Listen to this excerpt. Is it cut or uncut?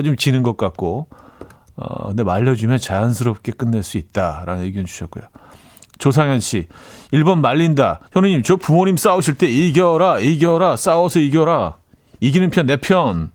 cut